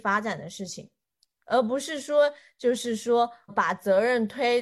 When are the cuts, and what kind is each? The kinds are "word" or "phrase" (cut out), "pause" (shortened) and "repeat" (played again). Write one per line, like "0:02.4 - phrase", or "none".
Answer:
0:03.5 - word